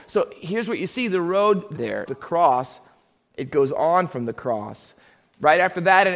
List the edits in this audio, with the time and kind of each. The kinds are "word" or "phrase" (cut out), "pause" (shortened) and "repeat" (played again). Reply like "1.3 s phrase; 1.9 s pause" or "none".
1.7 s phrase; 2.1 s phrase